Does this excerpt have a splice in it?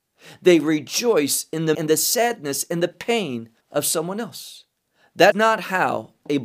yes; 3 cuts; at 1.7 s, 3.6 s, 5.3 s

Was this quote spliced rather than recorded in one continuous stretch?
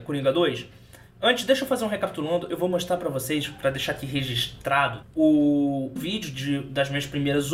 yes; 2 cuts; at 5.0 s, 6.0 s

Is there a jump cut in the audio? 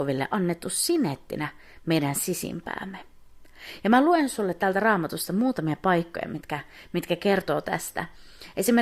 no; 0 cuts

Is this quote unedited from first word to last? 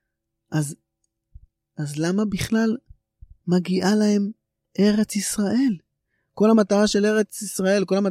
yes; 0 cuts

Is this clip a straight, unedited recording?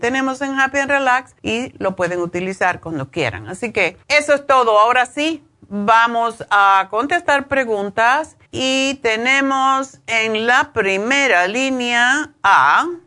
no; 3 cuts; at 1.4 s, 4.0 s, 8.4 s

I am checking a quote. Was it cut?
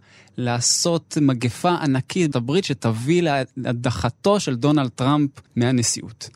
yes; 2 cuts; at 2.3 s, 5.5 s

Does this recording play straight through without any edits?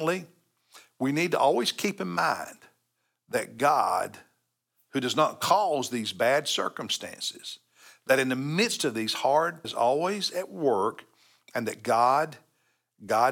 no; 1 cut; at 9.6 s

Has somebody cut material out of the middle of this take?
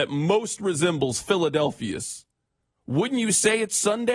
no; 0 cuts

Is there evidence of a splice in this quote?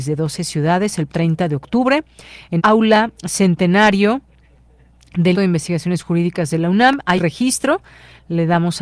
yes; 5 cuts; at 1.1 s, 2.6 s, 3.1 s, 5.3 s, 7.2 s

